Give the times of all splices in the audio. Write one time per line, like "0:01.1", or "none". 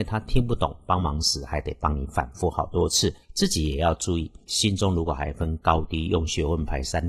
0:03.2
0:04.5